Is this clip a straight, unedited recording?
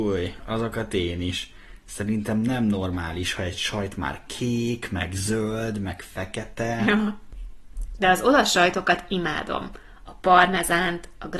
yes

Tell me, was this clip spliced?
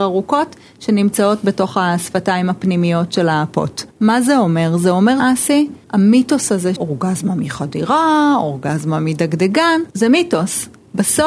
yes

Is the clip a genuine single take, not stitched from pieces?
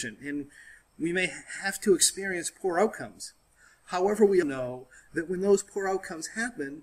no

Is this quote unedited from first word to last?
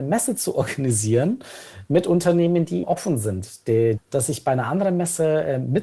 no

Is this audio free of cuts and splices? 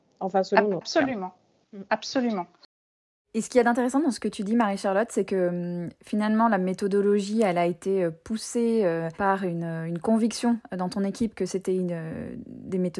no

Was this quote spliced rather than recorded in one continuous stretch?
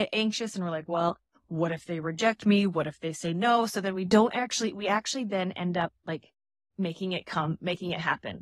no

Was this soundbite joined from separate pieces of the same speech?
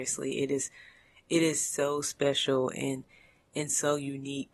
no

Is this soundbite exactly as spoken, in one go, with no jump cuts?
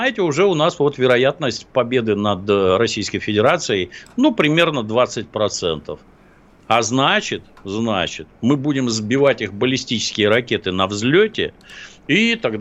yes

